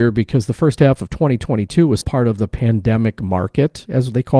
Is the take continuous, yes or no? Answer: no